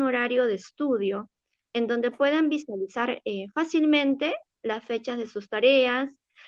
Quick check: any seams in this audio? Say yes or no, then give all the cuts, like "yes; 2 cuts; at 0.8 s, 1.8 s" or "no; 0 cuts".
no; 0 cuts